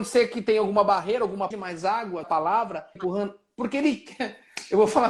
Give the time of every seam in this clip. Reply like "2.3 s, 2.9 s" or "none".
1.5 s, 2.2 s, 3.0 s